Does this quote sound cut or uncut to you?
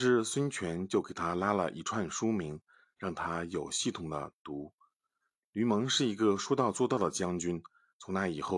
uncut